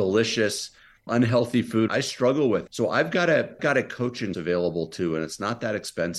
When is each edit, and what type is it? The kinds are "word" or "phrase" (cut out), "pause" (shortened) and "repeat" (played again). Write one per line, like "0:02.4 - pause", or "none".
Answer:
0:01.1 - word
0:01.9 - word
0:02.7 - word
0:03.6 - word
0:04.3 - word